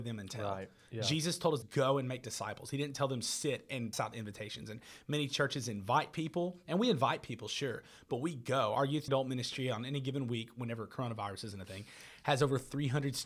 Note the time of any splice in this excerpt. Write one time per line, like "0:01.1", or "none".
0:01.6
0:03.9
0:09.1